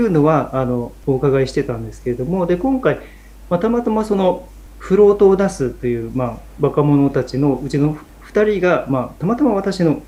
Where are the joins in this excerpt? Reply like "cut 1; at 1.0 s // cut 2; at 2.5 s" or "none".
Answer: none